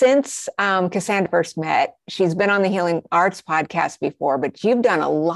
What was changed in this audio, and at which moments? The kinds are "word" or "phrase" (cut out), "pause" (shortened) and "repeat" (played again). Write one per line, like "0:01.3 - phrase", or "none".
0:01.3 - phrase